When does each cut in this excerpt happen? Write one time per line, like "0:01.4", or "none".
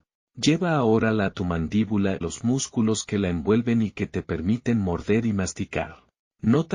0:01.3
0:02.2